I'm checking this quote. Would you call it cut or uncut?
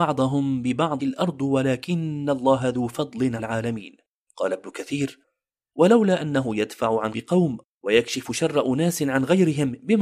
cut